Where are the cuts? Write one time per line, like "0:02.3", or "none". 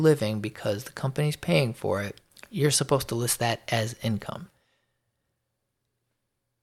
0:02.3